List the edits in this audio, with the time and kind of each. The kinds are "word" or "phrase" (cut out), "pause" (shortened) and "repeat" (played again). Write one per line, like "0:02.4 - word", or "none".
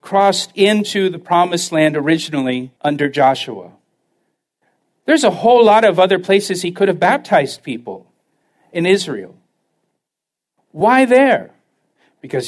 0:02.8 - pause